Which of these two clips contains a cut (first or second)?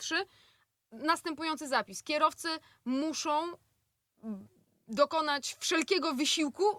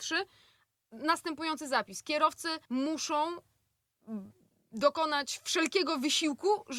second